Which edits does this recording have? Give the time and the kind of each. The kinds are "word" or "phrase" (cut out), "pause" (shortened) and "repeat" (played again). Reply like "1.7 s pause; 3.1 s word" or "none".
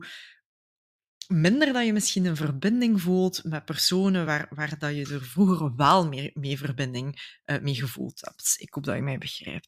none